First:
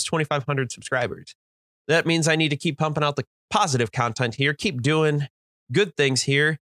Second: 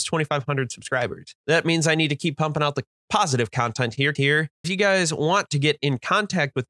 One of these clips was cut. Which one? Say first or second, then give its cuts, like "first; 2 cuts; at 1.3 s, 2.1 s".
second; 3 cuts; at 1.4 s, 4.1 s, 4.6 s